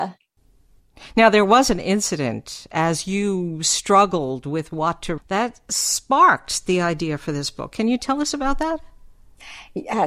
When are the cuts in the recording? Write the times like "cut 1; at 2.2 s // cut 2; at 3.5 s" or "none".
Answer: cut 1; at 5.2 s